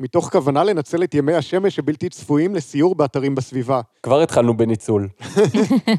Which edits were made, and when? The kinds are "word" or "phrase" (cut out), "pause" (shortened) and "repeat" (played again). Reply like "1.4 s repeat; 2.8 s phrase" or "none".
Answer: none

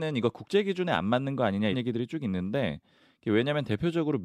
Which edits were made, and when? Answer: 1.7 s word

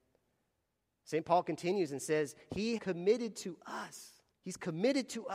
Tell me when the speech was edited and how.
2.8 s word; 4.3 s pause

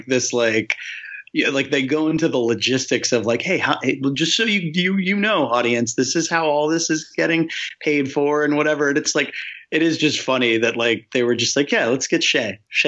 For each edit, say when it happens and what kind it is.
none

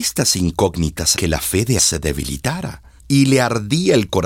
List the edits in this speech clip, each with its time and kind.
1.2 s word; 1.8 s word; 3.0 s pause

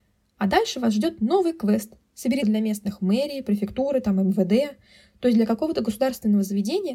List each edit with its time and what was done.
2.4 s word

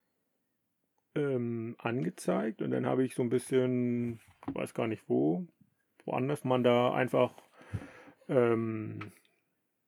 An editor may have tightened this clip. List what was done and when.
6.4 s phrase

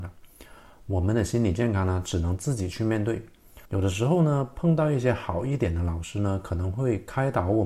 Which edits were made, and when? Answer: 3.7 s pause

